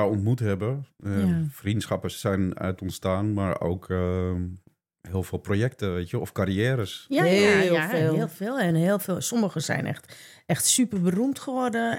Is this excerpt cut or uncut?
uncut